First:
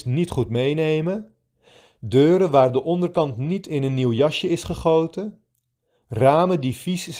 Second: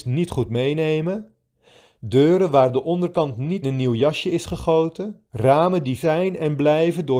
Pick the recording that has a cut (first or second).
second